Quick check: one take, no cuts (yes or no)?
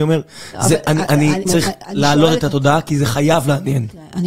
no